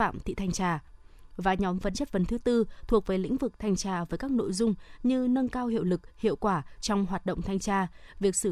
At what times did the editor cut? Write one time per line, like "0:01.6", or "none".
0:01.9